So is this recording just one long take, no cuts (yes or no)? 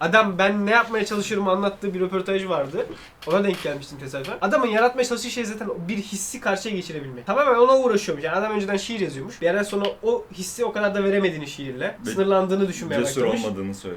yes